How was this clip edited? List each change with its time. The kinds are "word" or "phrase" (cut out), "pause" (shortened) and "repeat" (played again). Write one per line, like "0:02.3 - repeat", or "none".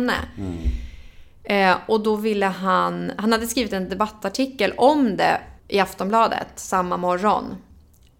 0:05.6 - pause